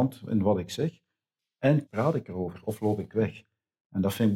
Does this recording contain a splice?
yes; 1 cut; at 1.9 s

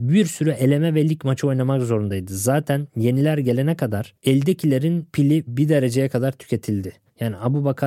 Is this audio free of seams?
yes; 0 cuts

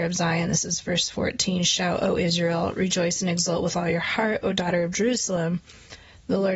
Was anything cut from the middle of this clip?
no; 0 cuts

